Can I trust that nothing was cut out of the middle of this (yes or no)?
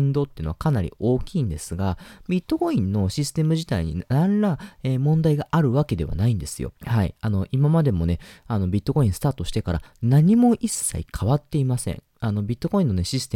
no